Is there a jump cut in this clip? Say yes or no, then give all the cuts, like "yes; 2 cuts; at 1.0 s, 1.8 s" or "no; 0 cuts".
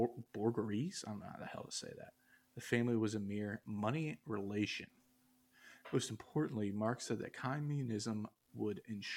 no; 0 cuts